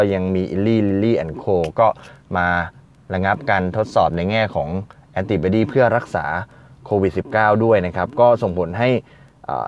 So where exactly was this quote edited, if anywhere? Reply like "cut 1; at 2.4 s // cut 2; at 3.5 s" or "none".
none